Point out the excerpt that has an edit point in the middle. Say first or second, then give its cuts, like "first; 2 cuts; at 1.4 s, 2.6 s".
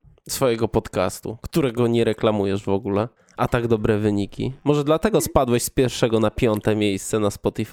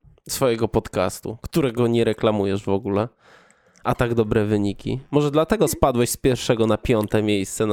first; 1 cut; at 3.2 s